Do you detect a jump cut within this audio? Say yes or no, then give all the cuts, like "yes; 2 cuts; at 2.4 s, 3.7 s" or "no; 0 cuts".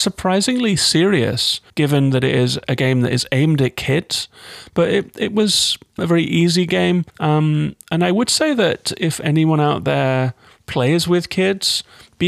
yes; 3 cuts; at 1.7 s, 6.0 s, 7.1 s